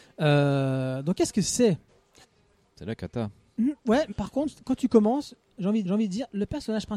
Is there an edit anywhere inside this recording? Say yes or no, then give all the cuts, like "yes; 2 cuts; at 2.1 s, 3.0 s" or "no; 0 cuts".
yes; 4 cuts; at 2.2 s, 3.8 s, 4.1 s, 5.8 s